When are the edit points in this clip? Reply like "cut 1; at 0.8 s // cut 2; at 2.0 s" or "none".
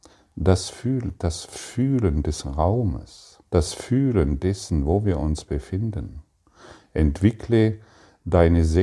cut 1; at 3.4 s